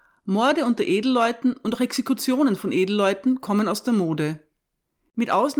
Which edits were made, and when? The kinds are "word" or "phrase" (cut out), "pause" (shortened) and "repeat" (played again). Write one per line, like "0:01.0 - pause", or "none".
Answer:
none